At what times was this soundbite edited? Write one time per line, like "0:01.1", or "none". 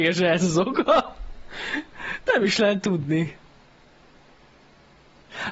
0:02.3